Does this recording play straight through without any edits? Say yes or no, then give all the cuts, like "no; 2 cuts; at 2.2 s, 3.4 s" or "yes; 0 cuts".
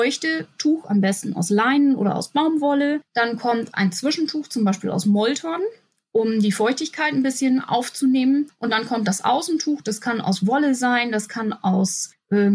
yes; 0 cuts